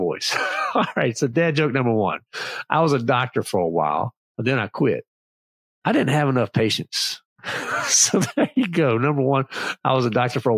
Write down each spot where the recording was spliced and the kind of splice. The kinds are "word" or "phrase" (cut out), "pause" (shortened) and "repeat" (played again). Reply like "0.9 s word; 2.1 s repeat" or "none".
none